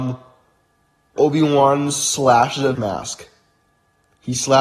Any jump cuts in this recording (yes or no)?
yes